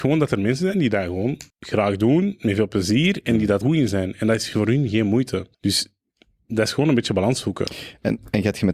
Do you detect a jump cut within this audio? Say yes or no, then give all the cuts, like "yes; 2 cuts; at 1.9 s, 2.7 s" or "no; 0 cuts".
yes; 3 cuts; at 1.5 s, 3.6 s, 5.5 s